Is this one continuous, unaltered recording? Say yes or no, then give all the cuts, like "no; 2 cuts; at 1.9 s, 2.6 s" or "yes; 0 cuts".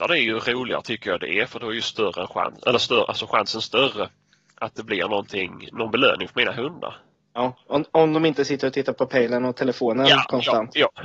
yes; 0 cuts